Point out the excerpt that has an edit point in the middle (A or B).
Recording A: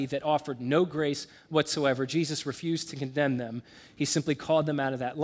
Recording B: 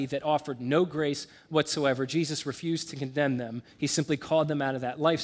B